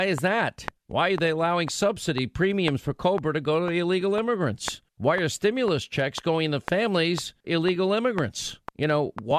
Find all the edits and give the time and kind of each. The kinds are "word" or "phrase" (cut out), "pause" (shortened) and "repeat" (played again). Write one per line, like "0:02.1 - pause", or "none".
0:07.4 - word